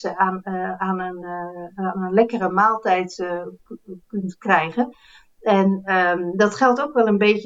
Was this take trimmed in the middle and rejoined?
no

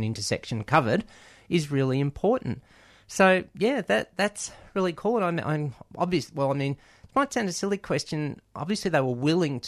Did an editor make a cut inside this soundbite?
no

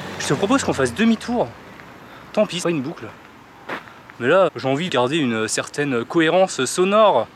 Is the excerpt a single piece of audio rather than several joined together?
no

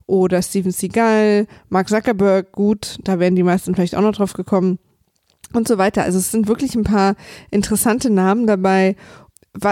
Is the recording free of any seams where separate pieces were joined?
yes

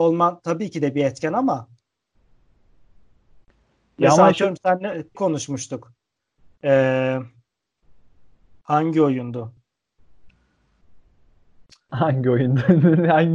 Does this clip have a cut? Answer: yes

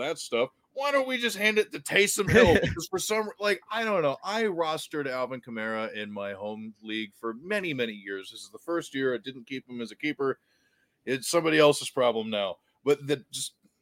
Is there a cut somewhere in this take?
no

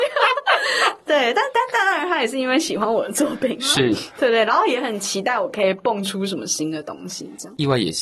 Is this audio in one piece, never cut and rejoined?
yes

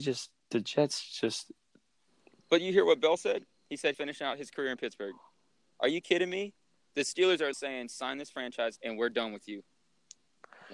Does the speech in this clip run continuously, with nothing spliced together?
no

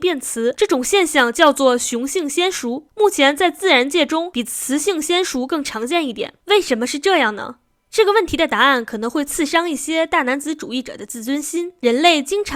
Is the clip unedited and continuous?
yes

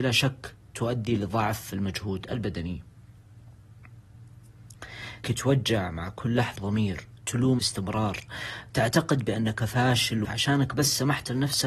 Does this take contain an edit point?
yes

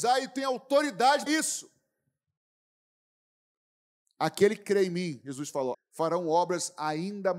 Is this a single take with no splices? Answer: no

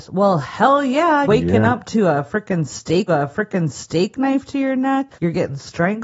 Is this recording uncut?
no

